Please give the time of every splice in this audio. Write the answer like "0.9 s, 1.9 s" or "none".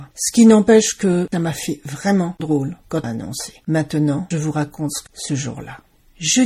1.3 s, 2.4 s, 3.0 s, 4.3 s, 5.1 s